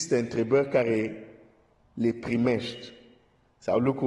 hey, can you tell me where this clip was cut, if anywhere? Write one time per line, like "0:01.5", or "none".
0:01.7